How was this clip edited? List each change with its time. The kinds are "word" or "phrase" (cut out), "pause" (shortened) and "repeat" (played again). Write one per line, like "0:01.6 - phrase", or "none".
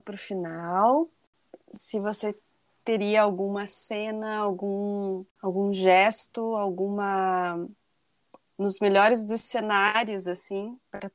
none